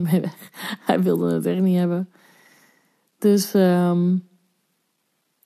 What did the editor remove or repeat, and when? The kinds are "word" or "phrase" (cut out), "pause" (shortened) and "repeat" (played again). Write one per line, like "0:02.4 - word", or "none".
none